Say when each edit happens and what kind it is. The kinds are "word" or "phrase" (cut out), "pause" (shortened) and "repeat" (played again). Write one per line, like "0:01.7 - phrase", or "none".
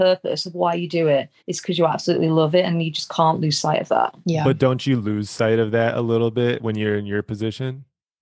0:01.4 - pause
0:04.2 - pause